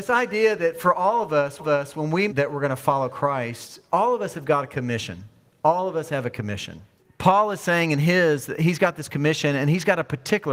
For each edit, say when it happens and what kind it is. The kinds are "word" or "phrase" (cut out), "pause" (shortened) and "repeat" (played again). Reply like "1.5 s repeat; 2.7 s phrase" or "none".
1.6 s repeat; 2.3 s phrase; 7.0 s pause